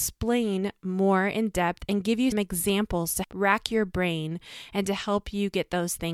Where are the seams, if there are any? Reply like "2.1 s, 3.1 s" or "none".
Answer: 2.3 s, 3.2 s